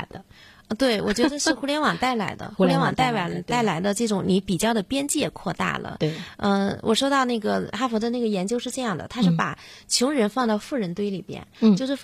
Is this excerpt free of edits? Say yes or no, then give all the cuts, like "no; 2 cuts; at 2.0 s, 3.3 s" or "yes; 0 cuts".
yes; 0 cuts